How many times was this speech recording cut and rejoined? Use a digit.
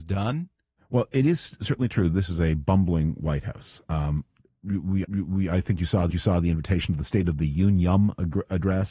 2